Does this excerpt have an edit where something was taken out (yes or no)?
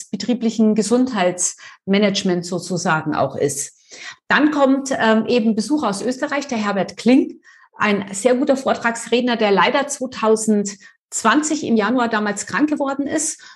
no